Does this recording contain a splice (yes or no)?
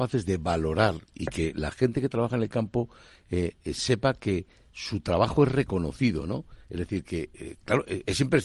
no